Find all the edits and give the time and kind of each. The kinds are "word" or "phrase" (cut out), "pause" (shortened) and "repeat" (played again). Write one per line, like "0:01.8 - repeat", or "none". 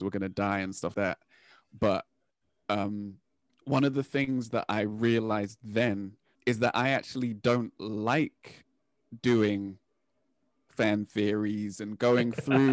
0:00.9 - word
0:03.5 - pause
0:06.3 - word